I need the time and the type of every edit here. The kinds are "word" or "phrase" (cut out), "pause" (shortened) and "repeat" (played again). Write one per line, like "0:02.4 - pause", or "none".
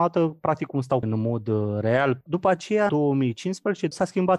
0:01.0 - word
0:02.9 - word